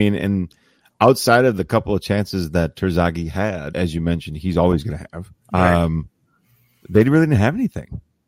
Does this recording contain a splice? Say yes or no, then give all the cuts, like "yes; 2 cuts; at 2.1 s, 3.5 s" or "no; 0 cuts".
yes; 2 cuts; at 3.7 s, 5.4 s